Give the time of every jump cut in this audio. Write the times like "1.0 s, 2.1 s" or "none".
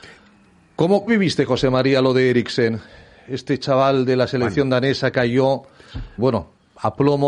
1.1 s, 5.1 s, 6.2 s

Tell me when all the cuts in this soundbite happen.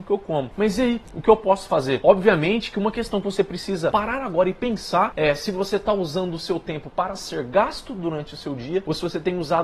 none

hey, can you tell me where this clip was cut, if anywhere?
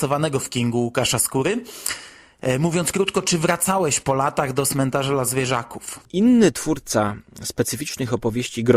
6.0 s

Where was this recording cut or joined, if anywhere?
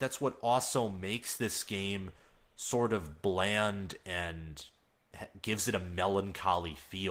none

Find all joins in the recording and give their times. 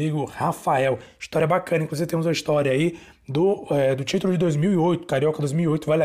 none

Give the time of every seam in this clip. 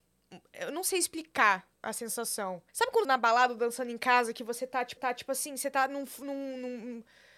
1.7 s, 2.7 s, 3.0 s, 5.0 s

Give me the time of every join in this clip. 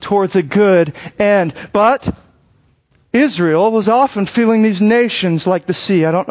none

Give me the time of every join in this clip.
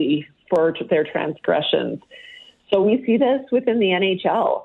none

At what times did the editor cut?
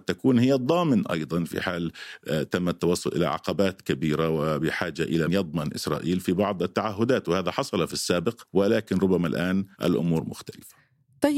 5.3 s, 9.7 s

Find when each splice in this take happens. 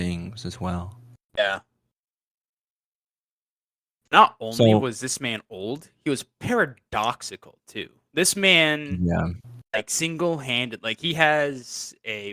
none

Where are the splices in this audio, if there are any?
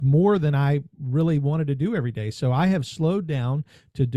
none

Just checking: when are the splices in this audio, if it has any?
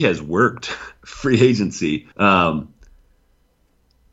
2.1 s

